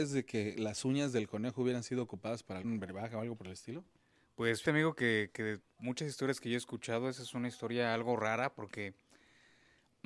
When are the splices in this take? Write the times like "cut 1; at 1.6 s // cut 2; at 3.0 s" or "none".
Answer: cut 1; at 2.6 s // cut 2; at 4.6 s

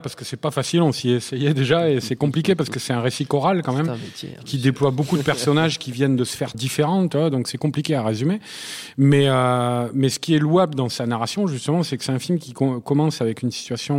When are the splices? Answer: cut 1; at 2.0 s // cut 2; at 6.5 s

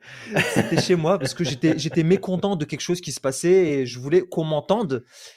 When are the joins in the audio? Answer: none

